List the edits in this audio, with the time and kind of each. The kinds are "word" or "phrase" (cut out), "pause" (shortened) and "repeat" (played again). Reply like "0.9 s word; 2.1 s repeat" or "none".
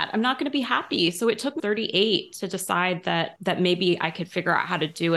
1.6 s phrase; 3.4 s word